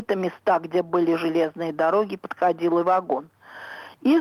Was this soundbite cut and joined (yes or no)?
yes